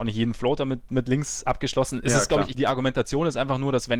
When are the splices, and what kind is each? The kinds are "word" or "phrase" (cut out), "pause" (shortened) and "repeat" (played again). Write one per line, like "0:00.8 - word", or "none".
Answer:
0:02.5 - phrase